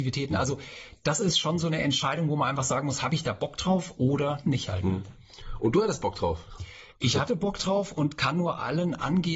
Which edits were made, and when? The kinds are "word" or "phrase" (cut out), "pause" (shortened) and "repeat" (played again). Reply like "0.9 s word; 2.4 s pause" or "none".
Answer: none